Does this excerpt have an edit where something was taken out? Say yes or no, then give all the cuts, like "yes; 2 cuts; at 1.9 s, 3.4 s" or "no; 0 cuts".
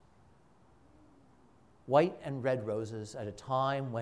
no; 0 cuts